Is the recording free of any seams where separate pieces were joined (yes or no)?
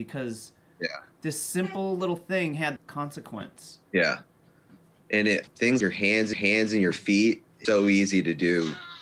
no